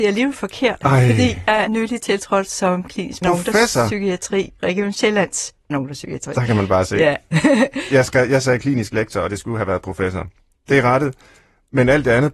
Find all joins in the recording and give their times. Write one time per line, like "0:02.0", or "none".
0:01.7
0:03.2
0:04.6
0:05.7

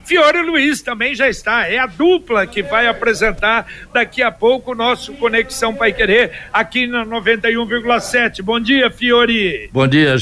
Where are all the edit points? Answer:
none

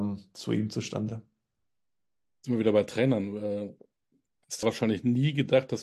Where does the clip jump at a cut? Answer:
0:04.6

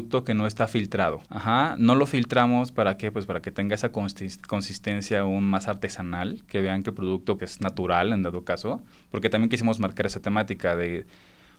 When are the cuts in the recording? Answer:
0:01.3
0:07.4
0:08.9

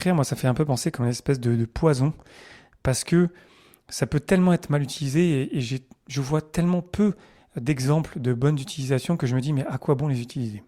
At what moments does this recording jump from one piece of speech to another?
none

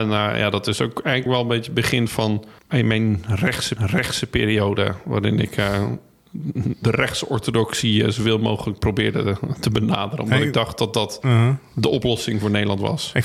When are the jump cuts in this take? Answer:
0:01.3
0:02.6
0:03.8

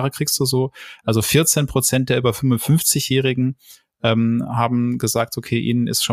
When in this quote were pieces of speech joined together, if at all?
none

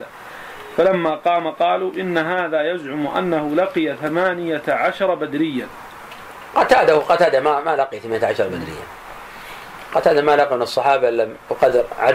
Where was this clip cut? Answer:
none

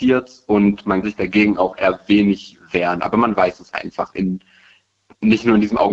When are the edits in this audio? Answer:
0:01.0
0:03.7

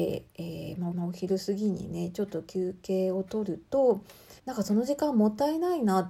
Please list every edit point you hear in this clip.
0:00.9
0:04.4

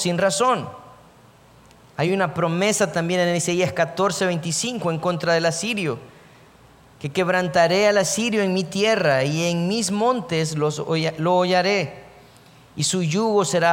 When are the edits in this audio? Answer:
none

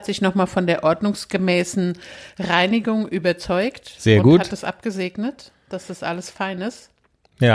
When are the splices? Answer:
none

